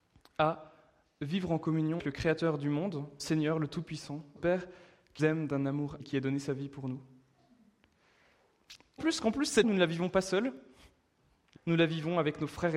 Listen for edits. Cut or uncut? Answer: cut